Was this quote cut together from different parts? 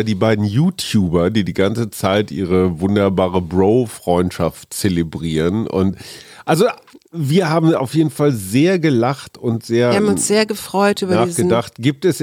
no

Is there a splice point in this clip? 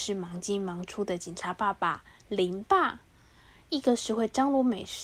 no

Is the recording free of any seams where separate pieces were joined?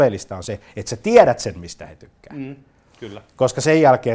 yes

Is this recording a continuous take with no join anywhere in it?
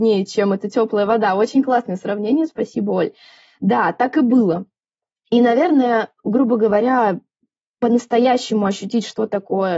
yes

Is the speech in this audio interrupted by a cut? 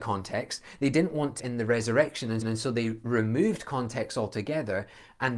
yes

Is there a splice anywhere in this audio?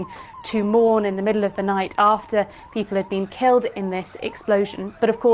no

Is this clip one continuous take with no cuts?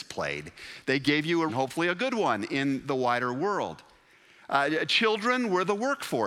no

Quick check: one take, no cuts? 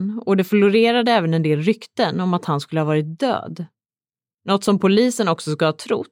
yes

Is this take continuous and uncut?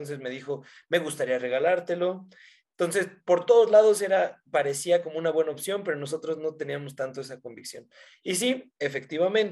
yes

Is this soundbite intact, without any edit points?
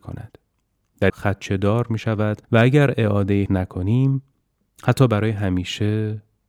no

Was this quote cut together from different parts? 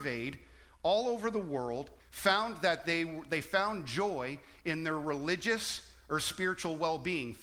yes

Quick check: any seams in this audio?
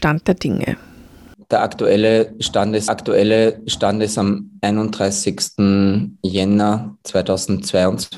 yes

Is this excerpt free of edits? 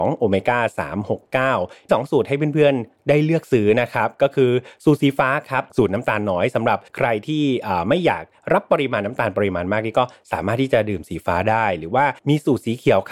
no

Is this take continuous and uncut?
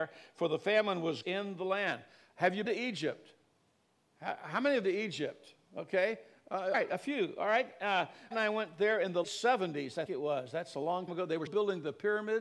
no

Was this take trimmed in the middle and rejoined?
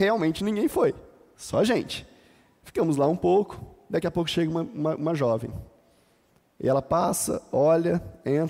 no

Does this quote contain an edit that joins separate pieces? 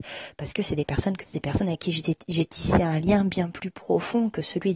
yes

